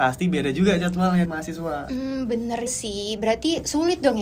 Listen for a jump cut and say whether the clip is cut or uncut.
cut